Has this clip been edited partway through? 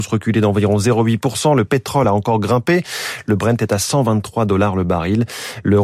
no; 0 cuts

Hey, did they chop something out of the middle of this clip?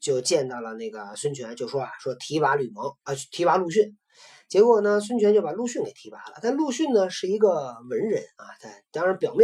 no; 0 cuts

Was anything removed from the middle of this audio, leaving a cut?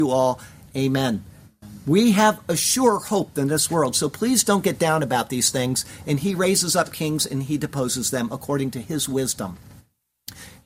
no; 0 cuts

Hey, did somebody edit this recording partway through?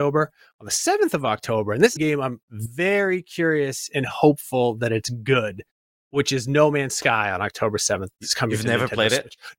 yes; 2 cuts; at 2.0 s, 2.4 s

